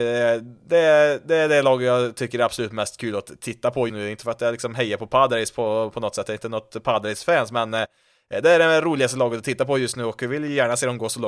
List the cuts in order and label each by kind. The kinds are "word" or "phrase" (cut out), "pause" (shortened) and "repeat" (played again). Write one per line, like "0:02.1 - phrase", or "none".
0:03.9 - word